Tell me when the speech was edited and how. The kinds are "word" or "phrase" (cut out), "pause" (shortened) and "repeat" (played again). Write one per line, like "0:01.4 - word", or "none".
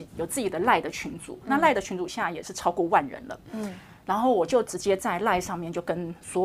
none